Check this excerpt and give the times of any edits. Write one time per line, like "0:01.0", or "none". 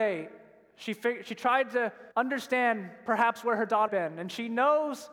0:02.1
0:03.9